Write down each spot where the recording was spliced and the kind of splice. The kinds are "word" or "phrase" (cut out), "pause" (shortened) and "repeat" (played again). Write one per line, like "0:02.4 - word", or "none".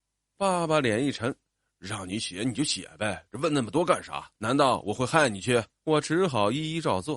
0:04.3 - pause
0:05.8 - pause